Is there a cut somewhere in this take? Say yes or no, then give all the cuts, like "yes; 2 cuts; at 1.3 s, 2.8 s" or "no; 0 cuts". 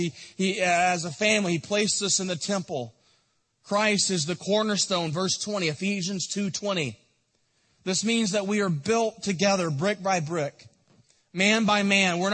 no; 0 cuts